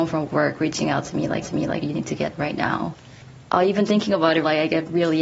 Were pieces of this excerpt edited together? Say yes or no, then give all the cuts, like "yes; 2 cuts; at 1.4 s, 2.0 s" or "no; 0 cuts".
yes; 3 cuts; at 1.4 s, 2.4 s, 3.9 s